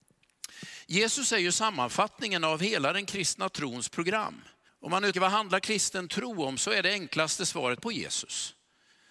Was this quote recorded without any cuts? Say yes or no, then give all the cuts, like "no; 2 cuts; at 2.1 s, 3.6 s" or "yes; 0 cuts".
no; 3 cuts; at 4.7 s, 5.1 s, 7.8 s